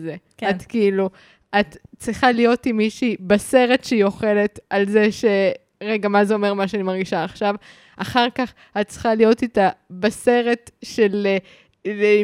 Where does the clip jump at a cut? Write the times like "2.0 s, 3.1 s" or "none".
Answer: none